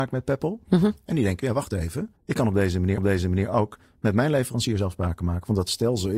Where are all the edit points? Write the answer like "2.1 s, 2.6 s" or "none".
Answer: 2.2 s, 3.0 s